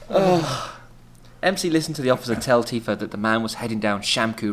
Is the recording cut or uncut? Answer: uncut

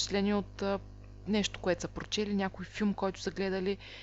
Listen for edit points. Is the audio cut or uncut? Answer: uncut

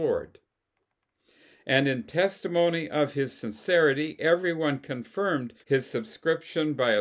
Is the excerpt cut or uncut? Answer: cut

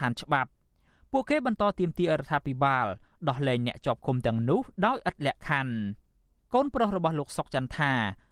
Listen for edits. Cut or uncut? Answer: uncut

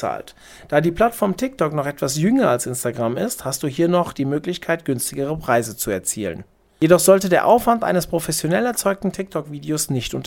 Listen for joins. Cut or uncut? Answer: uncut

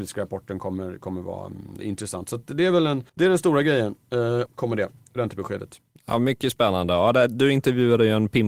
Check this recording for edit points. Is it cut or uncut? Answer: cut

